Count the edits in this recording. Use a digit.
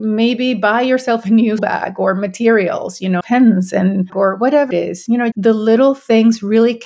5